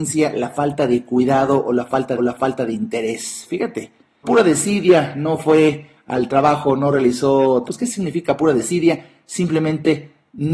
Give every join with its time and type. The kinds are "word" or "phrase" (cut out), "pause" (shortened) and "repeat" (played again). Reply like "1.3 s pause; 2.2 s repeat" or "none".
2.2 s repeat; 4.2 s word; 7.7 s phrase